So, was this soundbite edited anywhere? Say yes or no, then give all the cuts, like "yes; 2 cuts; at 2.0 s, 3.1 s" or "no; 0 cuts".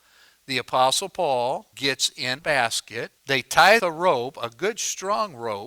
yes; 4 cuts; at 1.7 s, 2.4 s, 3.2 s, 3.8 s